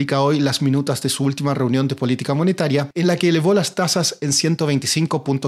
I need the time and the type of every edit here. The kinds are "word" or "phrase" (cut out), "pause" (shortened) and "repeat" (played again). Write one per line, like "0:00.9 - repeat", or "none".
none

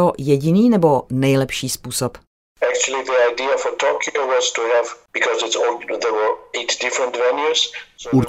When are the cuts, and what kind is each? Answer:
none

